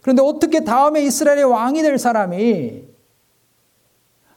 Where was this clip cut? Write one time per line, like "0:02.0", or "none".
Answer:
none